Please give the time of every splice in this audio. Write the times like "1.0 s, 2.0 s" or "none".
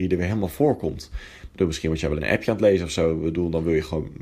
2.2 s